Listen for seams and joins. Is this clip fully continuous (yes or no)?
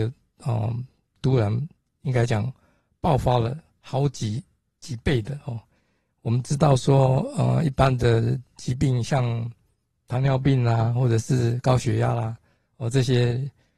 yes